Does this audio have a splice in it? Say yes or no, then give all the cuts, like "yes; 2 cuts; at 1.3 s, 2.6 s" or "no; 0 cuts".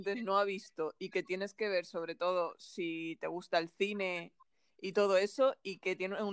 no; 0 cuts